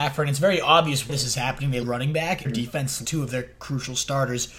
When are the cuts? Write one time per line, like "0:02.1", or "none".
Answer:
0:01.1
0:01.8
0:02.4
0:03.0